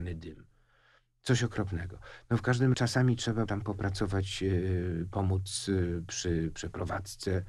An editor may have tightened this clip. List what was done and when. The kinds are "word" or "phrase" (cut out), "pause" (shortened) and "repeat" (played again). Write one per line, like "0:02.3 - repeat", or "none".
0:02.7 - word
0:03.5 - word